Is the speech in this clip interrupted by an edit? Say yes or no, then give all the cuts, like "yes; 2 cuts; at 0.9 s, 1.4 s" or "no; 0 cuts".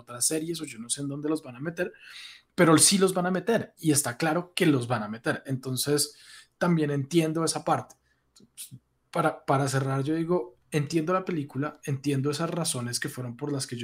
yes; 1 cut; at 2.5 s